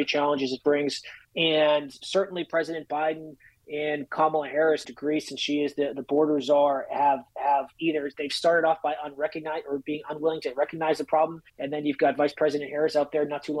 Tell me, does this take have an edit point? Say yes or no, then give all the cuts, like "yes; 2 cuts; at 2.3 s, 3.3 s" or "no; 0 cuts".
yes; 3 cuts; at 1.2 s, 4.8 s, 11.5 s